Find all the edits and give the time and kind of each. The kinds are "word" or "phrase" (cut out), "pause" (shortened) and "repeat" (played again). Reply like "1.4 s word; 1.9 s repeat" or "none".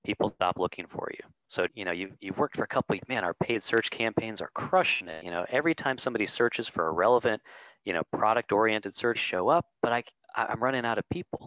1.7 s word; 3.0 s phrase; 9.2 s word; 9.7 s pause; 10.2 s pause